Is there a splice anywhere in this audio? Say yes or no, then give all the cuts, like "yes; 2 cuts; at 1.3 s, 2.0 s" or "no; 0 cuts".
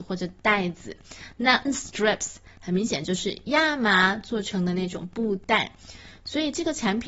yes; 1 cut; at 1.7 s